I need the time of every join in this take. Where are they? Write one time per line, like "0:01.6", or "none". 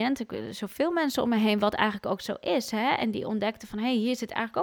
none